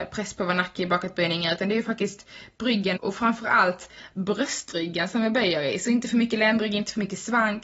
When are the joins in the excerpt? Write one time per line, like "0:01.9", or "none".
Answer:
0:03.0